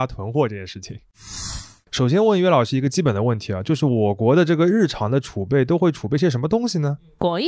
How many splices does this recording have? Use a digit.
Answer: 0